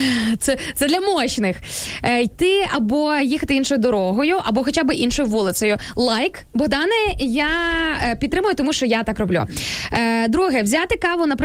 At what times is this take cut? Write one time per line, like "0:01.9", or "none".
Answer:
none